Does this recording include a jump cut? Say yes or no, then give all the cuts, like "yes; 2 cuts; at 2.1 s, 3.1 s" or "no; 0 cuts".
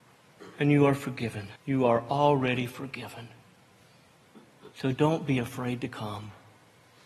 yes; 2 cuts; at 1.6 s, 4.7 s